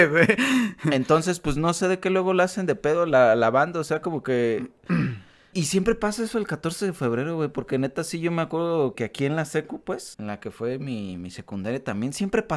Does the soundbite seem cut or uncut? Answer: cut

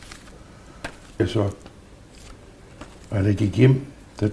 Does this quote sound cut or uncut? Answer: cut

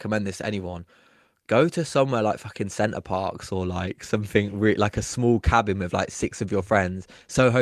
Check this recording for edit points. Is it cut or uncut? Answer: uncut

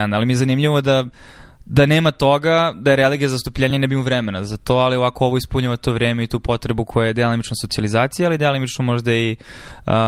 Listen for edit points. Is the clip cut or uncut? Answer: uncut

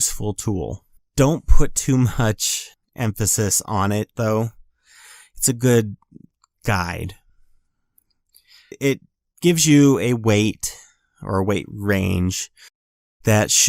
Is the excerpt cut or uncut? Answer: uncut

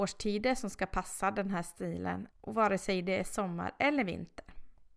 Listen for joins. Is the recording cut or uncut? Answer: cut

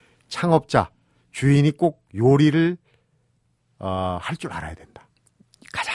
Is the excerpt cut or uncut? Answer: uncut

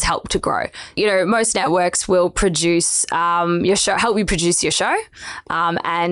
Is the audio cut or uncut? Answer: uncut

